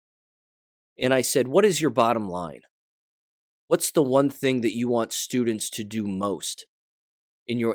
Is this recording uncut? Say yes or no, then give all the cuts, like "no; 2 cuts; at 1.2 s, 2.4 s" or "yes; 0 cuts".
yes; 0 cuts